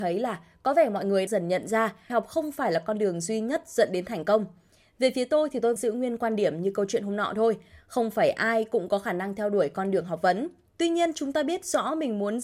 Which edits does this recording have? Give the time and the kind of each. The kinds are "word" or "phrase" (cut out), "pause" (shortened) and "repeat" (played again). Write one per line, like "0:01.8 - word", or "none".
0:01.3 - word
0:02.1 - word
0:05.8 - word